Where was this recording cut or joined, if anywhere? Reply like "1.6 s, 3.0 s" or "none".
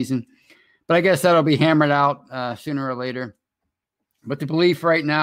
none